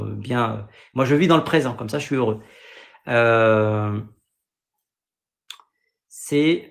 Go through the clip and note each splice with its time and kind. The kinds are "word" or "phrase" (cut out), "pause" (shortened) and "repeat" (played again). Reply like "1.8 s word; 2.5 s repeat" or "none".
none